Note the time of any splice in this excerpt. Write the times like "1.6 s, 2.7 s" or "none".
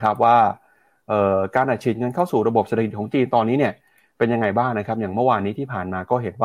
none